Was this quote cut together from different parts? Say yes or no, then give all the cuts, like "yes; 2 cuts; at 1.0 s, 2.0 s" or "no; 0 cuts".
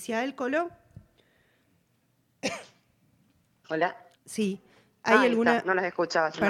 no; 0 cuts